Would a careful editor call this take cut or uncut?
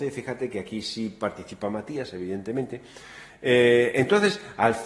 uncut